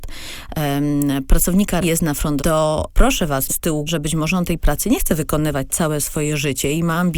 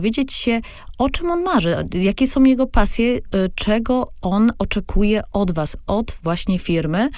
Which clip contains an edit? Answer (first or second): first